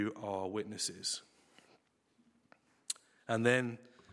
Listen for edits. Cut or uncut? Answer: uncut